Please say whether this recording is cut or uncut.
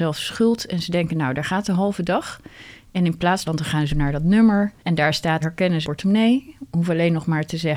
cut